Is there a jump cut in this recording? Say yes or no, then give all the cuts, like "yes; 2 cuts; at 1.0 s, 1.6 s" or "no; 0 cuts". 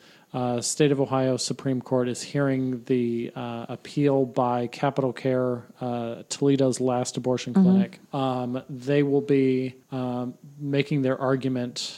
yes; 2 cuts; at 8.0 s, 9.8 s